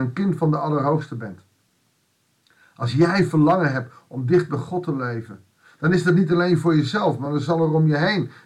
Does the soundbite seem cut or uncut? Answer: uncut